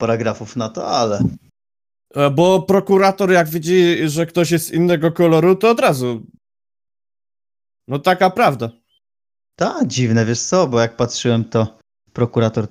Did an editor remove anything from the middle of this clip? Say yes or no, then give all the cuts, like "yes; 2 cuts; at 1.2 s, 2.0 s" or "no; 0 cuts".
no; 0 cuts